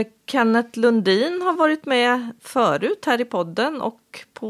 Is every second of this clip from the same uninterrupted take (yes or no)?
yes